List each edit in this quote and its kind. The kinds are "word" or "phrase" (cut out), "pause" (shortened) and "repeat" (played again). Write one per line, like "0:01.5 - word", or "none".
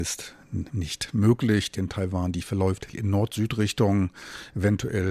0:01.8 - word
0:02.9 - word